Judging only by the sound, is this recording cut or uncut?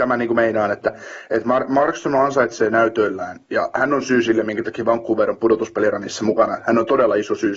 cut